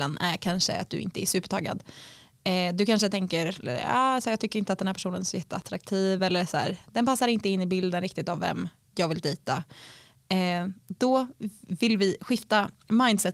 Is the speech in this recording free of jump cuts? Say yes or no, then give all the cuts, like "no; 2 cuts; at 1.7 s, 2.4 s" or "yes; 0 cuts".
yes; 0 cuts